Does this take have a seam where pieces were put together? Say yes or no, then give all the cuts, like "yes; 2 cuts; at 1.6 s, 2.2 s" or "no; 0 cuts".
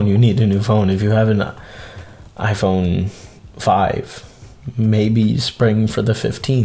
no; 0 cuts